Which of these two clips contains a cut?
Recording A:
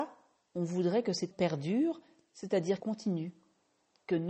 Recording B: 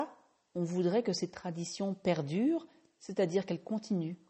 A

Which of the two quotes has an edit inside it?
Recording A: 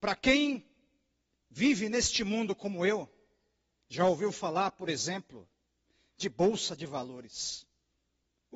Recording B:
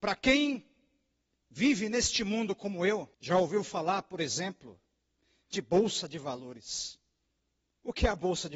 B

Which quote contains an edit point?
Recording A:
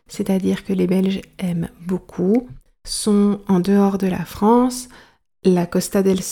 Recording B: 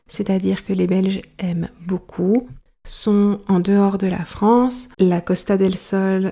B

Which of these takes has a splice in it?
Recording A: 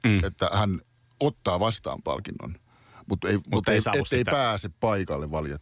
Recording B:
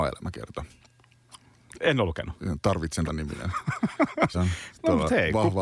B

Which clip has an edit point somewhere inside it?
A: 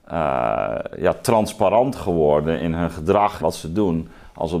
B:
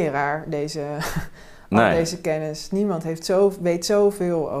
A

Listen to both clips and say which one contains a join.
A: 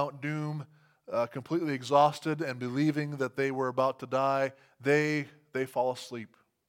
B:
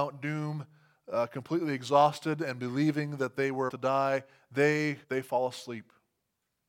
B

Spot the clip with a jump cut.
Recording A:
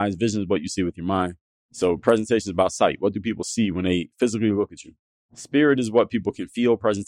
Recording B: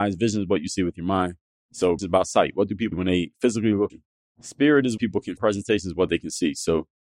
B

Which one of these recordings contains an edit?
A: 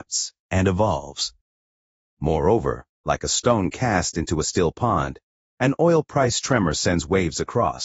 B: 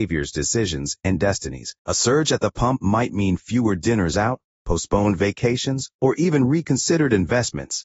B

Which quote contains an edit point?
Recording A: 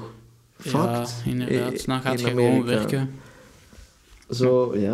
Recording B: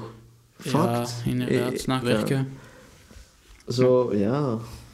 B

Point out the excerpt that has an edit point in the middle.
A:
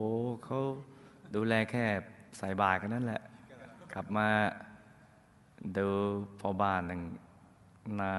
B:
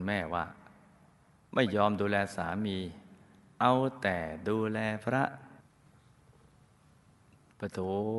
A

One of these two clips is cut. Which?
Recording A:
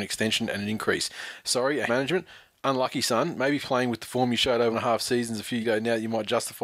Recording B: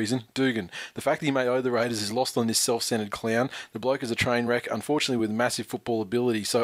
A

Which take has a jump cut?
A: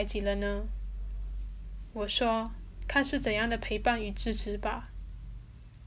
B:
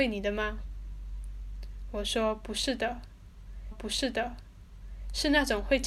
B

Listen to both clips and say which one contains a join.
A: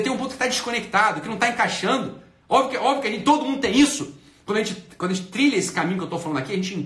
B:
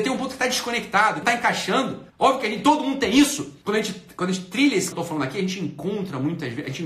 B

